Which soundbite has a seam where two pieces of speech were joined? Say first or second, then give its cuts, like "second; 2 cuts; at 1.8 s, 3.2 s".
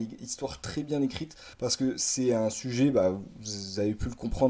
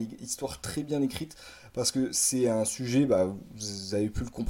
first; 1 cut; at 1.5 s